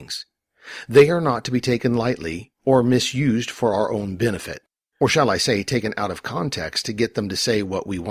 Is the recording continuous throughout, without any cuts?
yes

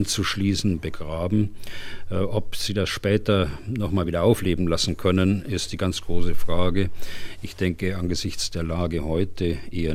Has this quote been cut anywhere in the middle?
no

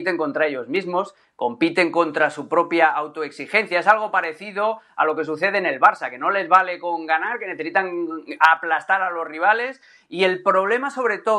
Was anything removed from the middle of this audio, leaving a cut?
no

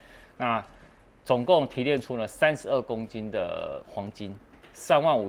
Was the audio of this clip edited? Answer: no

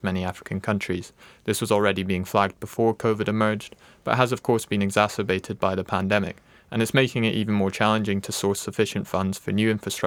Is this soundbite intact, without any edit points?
yes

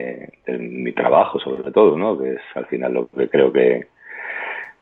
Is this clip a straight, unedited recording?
yes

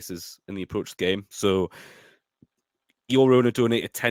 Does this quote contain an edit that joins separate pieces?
yes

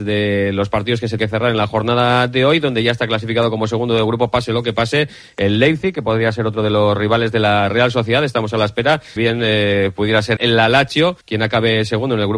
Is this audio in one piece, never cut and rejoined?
no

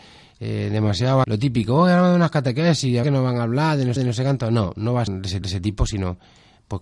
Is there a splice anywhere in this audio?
yes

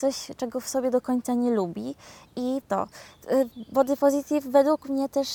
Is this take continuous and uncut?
no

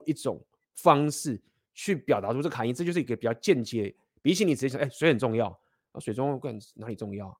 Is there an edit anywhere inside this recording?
no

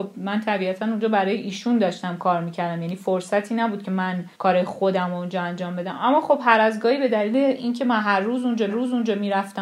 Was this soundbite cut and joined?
yes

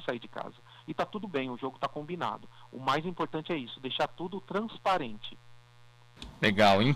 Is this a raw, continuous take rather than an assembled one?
yes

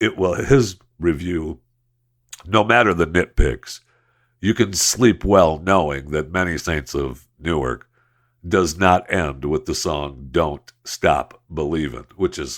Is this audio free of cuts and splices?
yes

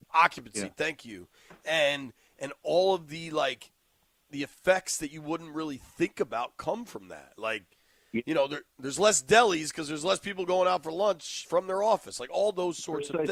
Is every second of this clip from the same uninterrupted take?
yes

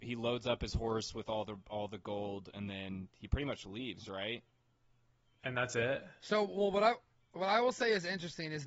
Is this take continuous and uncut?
yes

